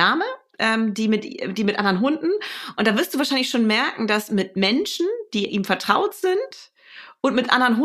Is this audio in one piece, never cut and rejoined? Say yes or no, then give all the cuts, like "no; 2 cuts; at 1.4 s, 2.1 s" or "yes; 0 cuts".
yes; 0 cuts